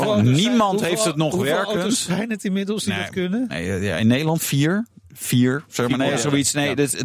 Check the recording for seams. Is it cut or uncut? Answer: uncut